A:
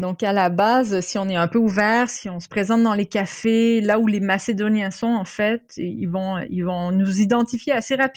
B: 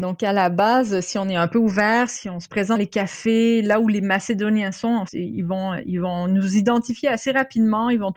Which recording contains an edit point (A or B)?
B